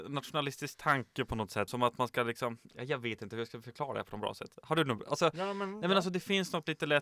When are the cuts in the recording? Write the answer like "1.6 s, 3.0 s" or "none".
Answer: 1.7 s, 4.5 s